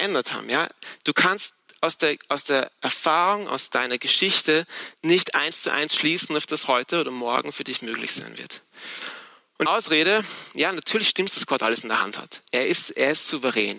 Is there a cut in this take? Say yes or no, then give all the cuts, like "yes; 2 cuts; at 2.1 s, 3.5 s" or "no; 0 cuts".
yes; 2 cuts; at 6.6 s, 9.7 s